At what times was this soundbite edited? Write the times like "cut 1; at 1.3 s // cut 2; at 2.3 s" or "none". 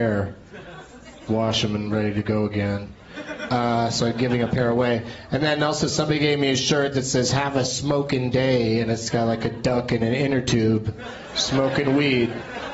cut 1; at 1.3 s